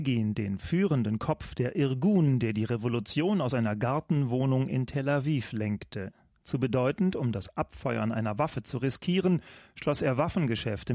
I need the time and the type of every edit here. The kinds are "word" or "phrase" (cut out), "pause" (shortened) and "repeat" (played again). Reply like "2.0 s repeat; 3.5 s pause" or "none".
none